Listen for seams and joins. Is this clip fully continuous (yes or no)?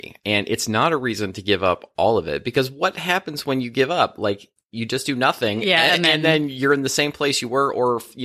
yes